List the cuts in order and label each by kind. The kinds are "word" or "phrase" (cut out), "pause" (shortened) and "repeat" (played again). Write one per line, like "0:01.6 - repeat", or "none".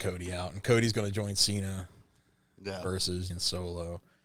0:03.3 - word